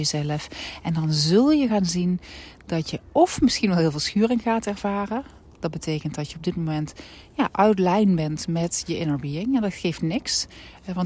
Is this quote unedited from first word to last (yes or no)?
yes